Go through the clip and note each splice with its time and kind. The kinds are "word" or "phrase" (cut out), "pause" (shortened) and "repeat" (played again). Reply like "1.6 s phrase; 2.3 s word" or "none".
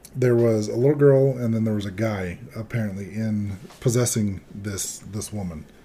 none